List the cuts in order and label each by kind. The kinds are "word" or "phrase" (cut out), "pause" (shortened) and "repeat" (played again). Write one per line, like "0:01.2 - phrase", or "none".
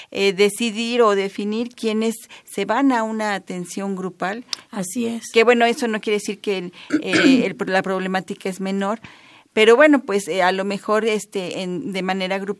none